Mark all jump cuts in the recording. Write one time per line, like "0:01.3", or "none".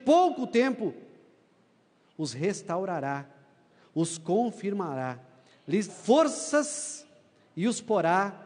0:05.9